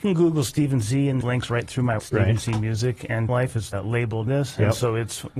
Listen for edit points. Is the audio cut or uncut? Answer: cut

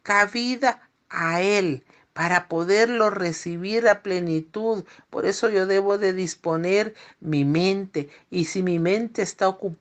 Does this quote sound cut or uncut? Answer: uncut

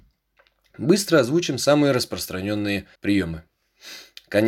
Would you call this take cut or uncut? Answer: cut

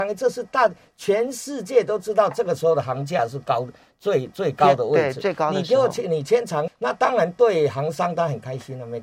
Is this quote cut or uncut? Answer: cut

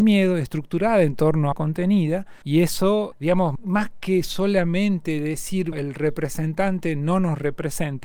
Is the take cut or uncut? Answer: cut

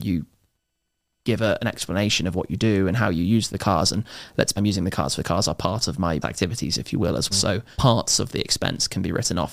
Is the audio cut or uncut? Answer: cut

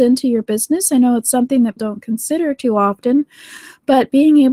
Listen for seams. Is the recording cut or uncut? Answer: cut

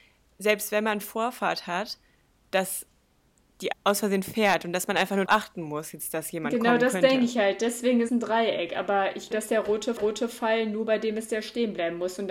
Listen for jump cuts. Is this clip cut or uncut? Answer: cut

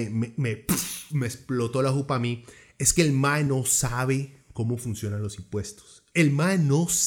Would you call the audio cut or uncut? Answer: uncut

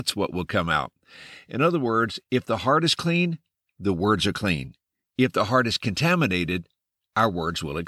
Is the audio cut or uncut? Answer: uncut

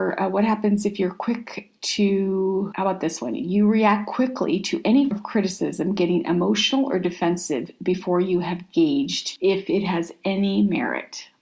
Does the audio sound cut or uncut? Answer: cut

